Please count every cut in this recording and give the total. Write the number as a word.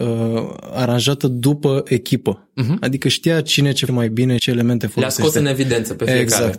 two